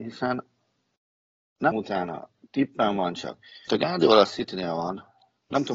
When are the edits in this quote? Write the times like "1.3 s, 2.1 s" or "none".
1.7 s, 3.7 s